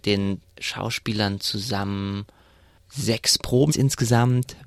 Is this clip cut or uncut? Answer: cut